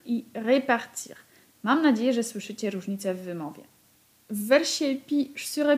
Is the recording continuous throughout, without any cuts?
yes; 0 cuts

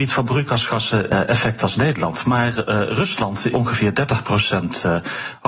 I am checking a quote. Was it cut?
yes; 2 cuts; at 1.1 s, 3.5 s

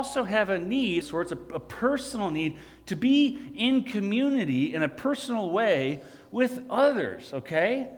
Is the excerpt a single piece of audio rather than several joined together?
no; 1 cut; at 1.0 s

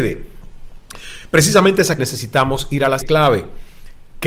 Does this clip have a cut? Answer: yes; 2 cuts; at 2.0 s, 3.0 s

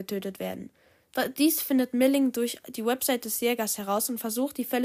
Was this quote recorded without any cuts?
yes; 0 cuts

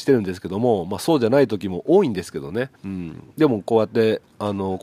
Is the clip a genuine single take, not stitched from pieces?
no; 1 cut; at 2.7 s

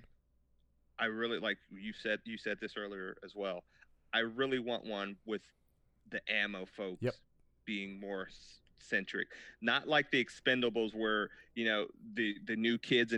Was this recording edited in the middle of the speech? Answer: no; 0 cuts

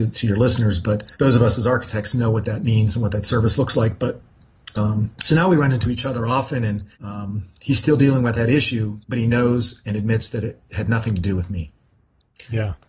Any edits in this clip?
yes; 4 cuts; at 1.1 s, 5.1 s, 6.9 s, 9.0 s

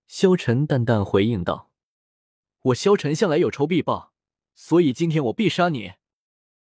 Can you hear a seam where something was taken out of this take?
no; 0 cuts

